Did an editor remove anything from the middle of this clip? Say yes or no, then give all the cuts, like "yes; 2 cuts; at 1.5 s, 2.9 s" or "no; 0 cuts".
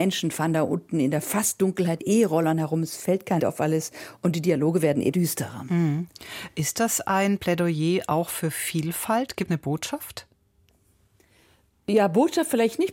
yes; 4 cuts; at 2.0 s, 3.4 s, 5.1 s, 9.5 s